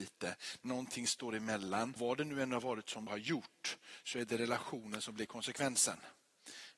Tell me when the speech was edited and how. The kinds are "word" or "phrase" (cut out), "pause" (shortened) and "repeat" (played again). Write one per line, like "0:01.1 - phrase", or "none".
0:02.0 - word